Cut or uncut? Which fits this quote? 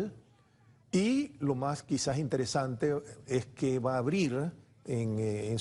uncut